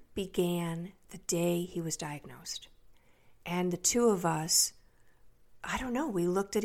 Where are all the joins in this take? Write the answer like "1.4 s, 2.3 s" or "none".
none